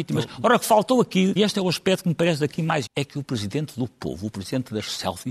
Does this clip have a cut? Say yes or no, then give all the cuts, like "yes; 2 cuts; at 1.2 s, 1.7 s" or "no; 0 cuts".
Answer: yes; 2 cuts; at 1.4 s, 2.9 s